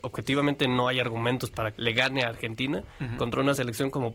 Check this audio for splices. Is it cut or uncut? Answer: cut